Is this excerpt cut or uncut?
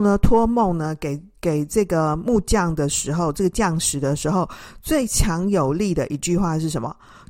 uncut